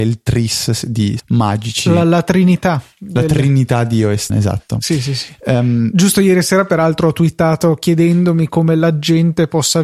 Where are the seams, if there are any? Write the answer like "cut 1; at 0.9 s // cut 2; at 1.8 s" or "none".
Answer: cut 1; at 1.2 s // cut 2; at 4.3 s